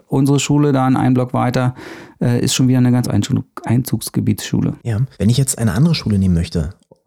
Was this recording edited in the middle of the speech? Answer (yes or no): yes